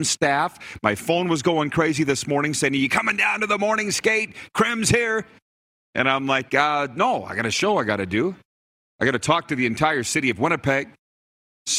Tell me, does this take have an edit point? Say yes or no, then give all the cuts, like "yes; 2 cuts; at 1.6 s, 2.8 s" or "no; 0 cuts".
no; 0 cuts